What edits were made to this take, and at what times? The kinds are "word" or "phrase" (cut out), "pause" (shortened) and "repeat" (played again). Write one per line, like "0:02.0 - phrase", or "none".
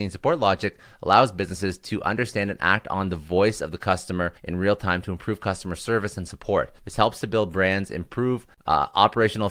0:04.4 - pause
0:06.8 - pause